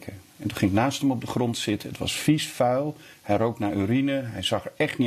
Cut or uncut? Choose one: uncut